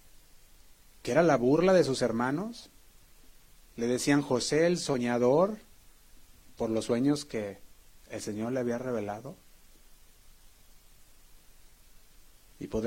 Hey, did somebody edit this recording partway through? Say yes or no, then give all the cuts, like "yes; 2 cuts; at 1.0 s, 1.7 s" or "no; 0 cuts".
no; 0 cuts